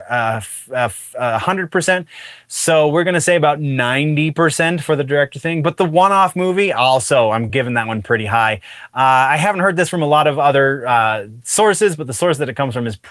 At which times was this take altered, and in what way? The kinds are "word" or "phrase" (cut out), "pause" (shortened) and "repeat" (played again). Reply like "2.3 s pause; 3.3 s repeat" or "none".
none